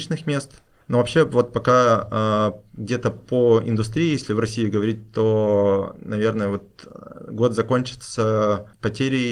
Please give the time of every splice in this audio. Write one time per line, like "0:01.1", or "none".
none